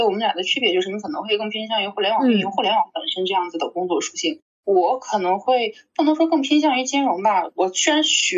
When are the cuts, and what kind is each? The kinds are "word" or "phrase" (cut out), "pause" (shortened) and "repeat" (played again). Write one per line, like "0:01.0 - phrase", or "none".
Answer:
0:04.5 - pause